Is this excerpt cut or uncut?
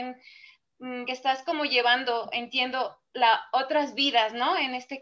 cut